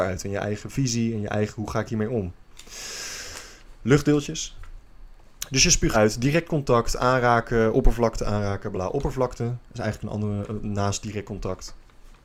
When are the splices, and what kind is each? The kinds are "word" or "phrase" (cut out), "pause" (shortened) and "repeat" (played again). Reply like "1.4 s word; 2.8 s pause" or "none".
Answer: 5.9 s word; 8.7 s word